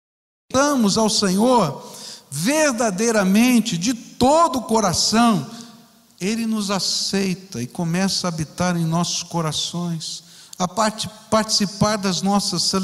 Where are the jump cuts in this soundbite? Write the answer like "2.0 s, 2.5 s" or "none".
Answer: none